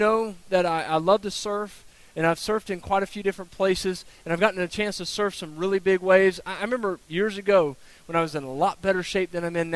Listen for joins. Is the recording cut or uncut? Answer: uncut